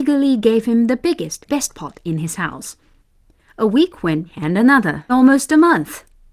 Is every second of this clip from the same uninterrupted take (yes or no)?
no